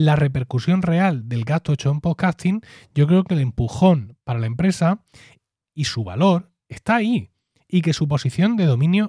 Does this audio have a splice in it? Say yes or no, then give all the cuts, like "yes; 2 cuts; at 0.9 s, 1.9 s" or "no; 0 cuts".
no; 0 cuts